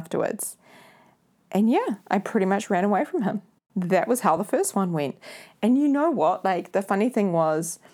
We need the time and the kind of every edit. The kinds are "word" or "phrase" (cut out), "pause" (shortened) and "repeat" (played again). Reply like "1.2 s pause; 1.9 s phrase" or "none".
none